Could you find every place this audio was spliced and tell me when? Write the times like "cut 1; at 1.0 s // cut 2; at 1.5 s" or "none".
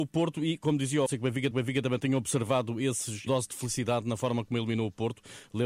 cut 1; at 1.1 s // cut 2; at 1.5 s // cut 3; at 3.3 s